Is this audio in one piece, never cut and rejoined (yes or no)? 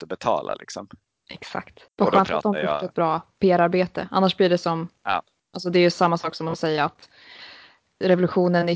no